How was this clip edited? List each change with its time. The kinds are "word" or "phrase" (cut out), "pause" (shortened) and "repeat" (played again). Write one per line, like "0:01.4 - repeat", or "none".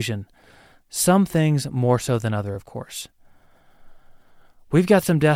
none